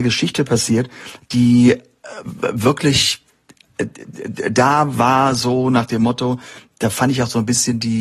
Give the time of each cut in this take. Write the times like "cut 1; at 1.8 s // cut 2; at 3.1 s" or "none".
none

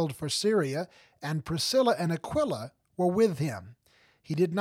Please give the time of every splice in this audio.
none

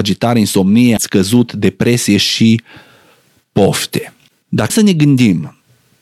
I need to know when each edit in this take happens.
cut 1; at 1.0 s // cut 2; at 4.7 s

